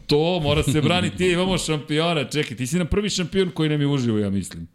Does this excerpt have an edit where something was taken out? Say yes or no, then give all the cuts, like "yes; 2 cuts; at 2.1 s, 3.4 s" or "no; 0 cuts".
no; 0 cuts